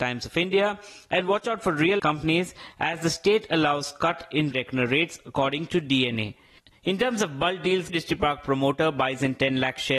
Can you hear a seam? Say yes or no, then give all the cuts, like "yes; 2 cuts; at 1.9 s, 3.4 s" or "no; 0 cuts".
yes; 3 cuts; at 2.0 s, 4.5 s, 7.9 s